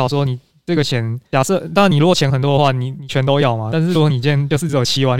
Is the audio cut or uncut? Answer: cut